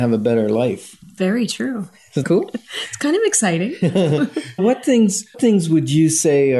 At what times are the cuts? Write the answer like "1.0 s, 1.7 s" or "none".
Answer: 1.2 s, 2.2 s, 4.6 s, 5.3 s